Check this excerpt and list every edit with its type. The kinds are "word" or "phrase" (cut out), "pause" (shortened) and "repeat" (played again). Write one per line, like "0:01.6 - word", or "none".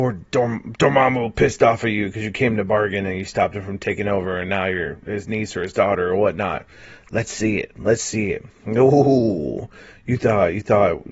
none